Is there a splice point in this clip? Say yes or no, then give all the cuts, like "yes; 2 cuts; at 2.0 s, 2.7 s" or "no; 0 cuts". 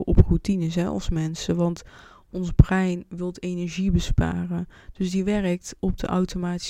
no; 0 cuts